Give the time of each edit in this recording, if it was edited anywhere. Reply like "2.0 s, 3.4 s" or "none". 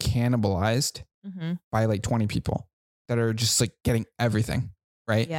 none